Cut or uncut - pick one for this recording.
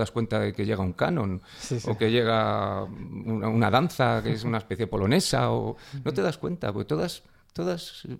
uncut